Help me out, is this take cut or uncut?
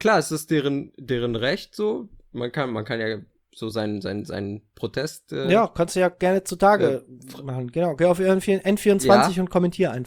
uncut